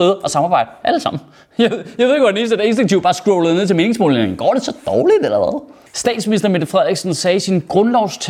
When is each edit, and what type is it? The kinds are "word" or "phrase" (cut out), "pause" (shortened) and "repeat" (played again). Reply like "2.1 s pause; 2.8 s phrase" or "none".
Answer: none